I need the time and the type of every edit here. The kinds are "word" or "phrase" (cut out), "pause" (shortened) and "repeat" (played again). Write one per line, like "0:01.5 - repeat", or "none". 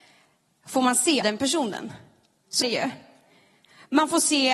0:01.2 - word
0:02.6 - word